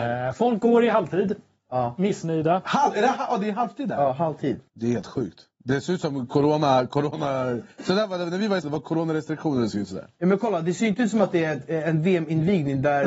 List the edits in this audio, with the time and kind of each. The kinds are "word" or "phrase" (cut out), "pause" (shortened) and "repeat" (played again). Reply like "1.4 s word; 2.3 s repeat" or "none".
4.7 s pause; 8.6 s word